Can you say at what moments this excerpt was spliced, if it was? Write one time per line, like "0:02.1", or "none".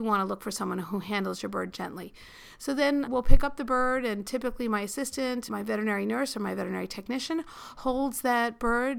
0:03.1
0:05.5